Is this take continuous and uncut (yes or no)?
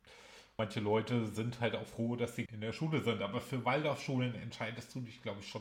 no